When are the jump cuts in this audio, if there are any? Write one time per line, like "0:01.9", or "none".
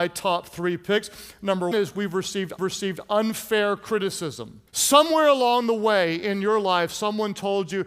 0:01.7
0:02.6
0:04.7